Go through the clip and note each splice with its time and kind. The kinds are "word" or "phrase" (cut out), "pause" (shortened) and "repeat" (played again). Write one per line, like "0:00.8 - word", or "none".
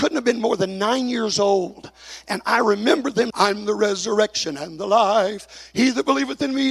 0:03.3 - word